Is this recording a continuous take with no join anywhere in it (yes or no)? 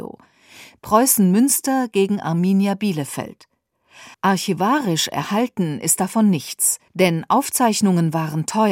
no